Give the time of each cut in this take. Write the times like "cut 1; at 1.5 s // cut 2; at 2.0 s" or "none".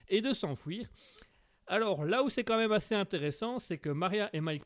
none